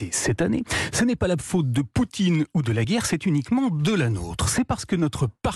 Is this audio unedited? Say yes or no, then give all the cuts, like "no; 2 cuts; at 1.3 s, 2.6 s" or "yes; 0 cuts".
yes; 0 cuts